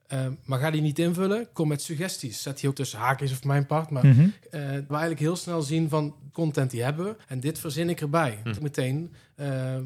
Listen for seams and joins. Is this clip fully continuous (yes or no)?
no